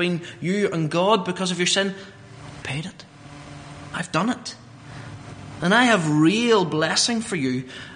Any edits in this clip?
yes; 1 cut; at 2.6 s

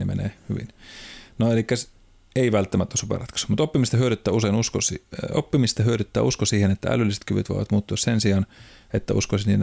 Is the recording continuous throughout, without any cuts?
yes; 0 cuts

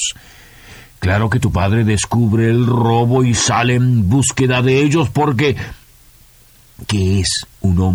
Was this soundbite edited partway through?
no; 0 cuts

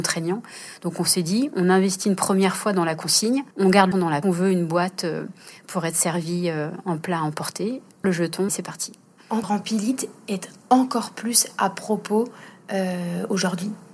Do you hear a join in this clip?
yes; 6 cuts; at 3.5 s, 3.9 s, 4.2 s, 8.0 s, 8.5 s, 9.4 s

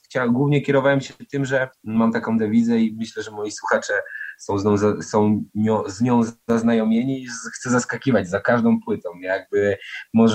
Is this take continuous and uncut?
no; 1 cut; at 1.7 s

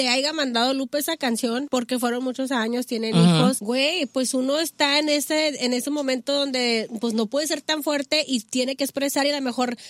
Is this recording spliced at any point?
no; 0 cuts

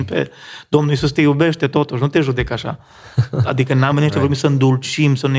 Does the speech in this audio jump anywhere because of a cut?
yes; 1 cut; at 3.9 s

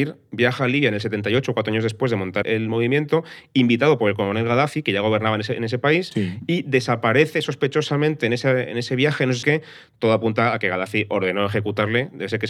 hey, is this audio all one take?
no; 2 cuts; at 2.4 s, 9.4 s

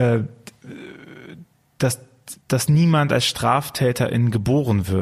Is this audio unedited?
no; 1 cut; at 2.4 s

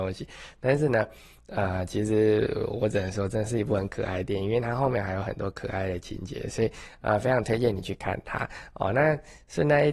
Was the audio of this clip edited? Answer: no; 0 cuts

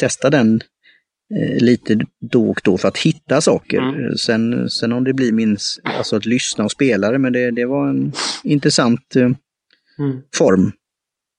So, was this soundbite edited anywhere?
no; 0 cuts

